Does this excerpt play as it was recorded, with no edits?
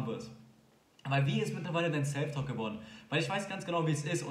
yes; 0 cuts

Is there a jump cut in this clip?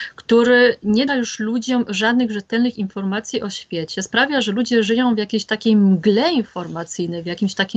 yes; 1 cut; at 1.1 s

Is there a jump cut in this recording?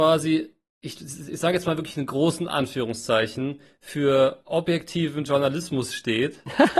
no; 0 cuts

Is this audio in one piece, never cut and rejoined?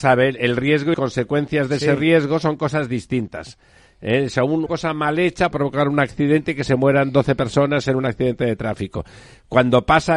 no; 3 cuts; at 0.9 s, 4.7 s, 5.5 s

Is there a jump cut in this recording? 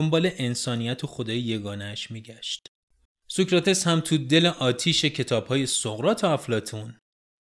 no; 0 cuts

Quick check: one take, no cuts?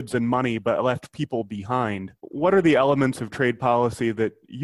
no; 1 cut; at 2.2 s

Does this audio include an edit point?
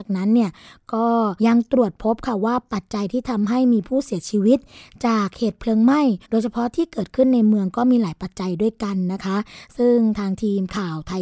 yes; 2 cuts; at 1.4 s, 6.2 s

